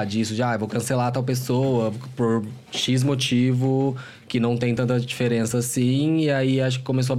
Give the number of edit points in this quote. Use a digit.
0